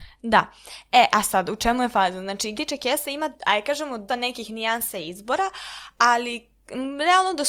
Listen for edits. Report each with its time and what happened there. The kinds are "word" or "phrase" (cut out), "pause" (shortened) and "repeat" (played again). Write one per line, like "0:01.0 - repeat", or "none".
0:02.5 - phrase
0:03.4 - pause
0:04.1 - word